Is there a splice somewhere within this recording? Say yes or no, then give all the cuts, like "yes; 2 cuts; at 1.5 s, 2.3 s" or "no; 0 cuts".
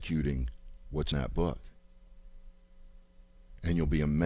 yes; 1 cut; at 1.1 s